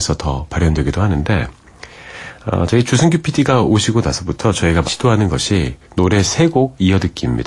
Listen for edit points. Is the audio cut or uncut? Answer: cut